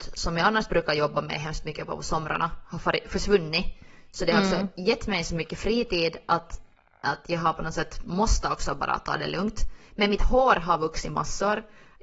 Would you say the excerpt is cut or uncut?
uncut